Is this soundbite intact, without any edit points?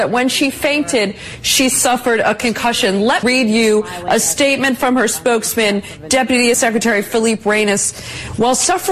no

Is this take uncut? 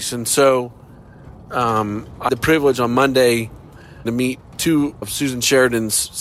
no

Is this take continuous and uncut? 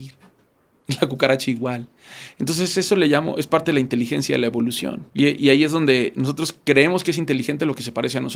no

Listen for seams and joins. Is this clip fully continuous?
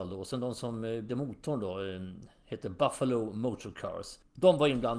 no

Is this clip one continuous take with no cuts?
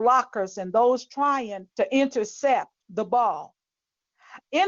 no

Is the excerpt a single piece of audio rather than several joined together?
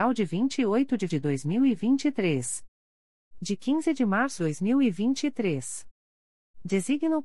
no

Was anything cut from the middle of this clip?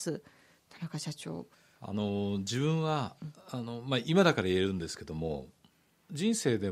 no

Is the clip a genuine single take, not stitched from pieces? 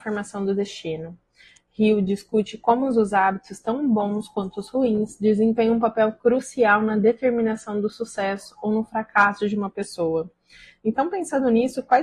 yes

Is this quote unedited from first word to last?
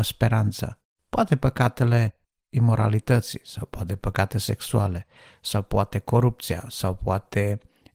yes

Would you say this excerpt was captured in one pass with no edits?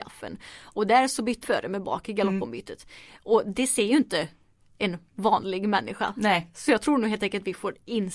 no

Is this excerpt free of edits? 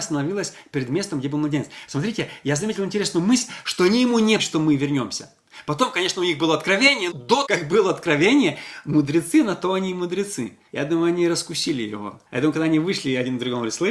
no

